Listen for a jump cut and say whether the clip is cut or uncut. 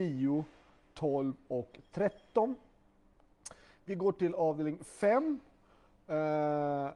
uncut